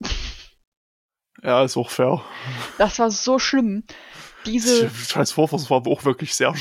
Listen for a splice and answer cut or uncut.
uncut